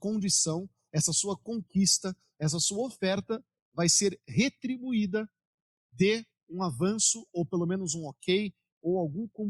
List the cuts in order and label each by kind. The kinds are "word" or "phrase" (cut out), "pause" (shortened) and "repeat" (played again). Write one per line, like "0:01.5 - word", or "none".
none